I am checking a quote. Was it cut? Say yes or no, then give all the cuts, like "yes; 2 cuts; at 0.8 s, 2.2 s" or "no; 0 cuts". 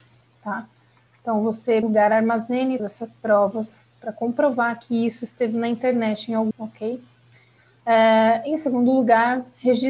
yes; 3 cuts; at 1.8 s, 2.8 s, 6.5 s